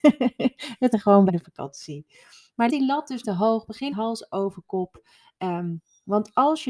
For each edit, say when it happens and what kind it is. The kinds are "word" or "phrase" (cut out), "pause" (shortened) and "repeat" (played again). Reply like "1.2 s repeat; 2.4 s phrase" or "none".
0.9 s word; 1.3 s word; 2.7 s word; 3.2 s word; 3.9 s word